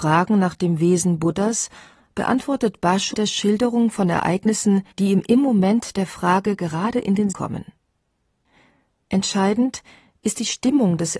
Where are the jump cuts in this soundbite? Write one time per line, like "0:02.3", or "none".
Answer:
0:03.1
0:04.9
0:07.3